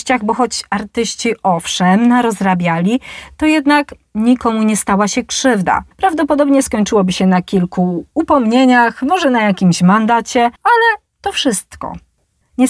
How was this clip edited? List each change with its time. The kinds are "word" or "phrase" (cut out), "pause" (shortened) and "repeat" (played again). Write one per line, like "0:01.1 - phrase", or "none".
0:05.9 - pause
0:10.6 - pause